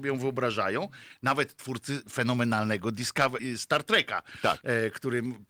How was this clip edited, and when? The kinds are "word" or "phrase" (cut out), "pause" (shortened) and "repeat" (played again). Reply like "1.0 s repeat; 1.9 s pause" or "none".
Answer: 3.4 s word